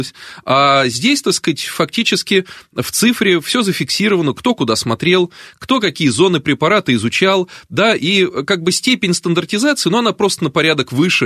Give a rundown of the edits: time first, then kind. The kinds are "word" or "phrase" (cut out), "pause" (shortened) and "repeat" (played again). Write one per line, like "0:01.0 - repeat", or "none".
none